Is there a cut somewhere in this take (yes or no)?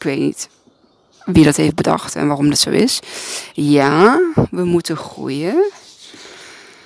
no